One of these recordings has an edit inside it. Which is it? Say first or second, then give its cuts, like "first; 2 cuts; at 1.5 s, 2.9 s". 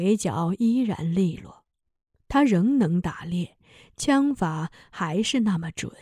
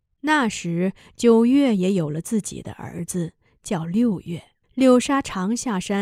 second; 1 cut; at 4.6 s